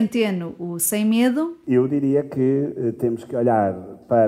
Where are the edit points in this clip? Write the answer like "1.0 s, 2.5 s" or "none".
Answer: none